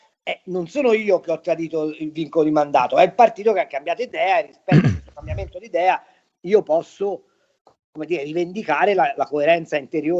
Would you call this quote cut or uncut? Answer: uncut